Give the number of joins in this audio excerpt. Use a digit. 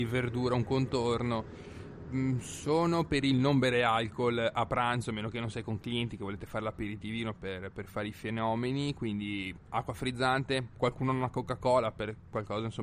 0